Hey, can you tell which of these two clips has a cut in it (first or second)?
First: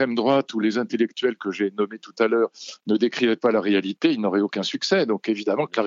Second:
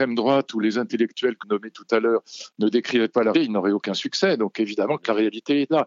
second